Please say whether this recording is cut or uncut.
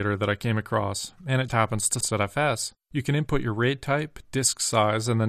cut